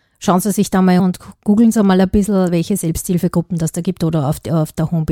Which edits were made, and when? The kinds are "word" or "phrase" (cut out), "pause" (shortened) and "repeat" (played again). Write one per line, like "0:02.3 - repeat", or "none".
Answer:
0:01.0 - word